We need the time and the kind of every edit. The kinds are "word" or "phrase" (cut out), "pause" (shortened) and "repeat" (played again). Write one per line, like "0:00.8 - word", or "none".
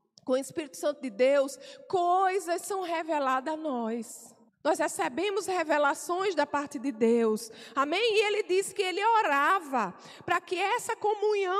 0:04.5 - pause